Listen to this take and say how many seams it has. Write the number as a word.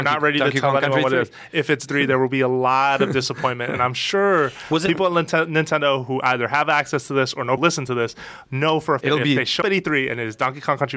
four